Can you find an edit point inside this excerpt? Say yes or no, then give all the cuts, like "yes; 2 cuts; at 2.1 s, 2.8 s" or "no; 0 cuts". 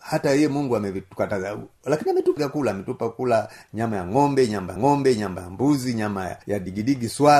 yes; 3 cuts; at 2.4 s, 4.8 s, 6.4 s